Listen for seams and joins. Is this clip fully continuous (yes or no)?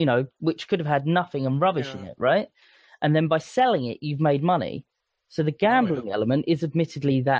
yes